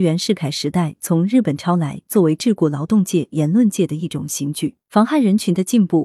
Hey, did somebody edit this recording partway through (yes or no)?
yes